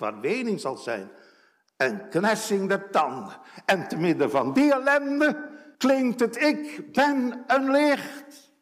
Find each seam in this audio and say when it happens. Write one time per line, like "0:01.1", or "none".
0:05.7